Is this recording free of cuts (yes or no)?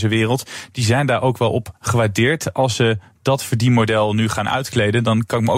yes